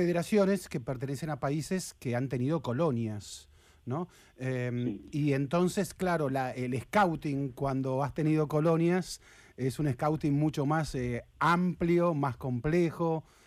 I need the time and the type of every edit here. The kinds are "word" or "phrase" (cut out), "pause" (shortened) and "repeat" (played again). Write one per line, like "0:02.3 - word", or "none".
none